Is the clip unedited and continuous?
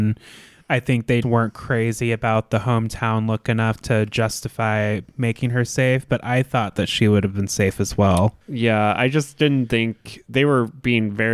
no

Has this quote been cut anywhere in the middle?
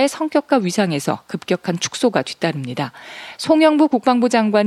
no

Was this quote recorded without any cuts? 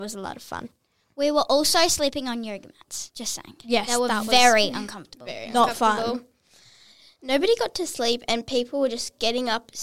yes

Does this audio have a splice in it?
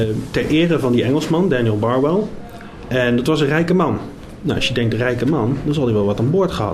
no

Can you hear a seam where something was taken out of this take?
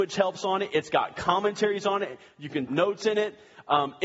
yes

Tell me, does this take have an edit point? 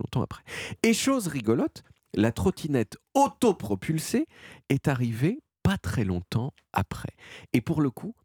no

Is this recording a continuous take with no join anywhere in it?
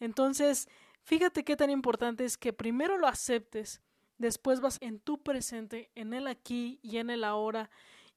no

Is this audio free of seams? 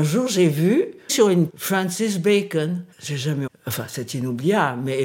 no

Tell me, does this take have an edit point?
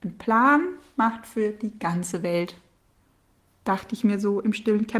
no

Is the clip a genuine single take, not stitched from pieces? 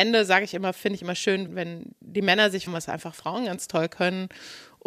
no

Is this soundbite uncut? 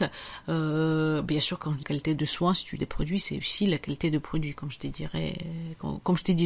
no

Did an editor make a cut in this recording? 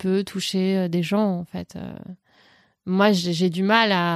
no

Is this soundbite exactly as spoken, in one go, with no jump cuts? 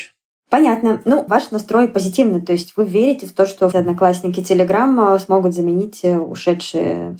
no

